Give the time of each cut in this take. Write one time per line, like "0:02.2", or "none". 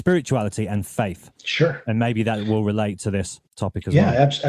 0:01.4
0:03.5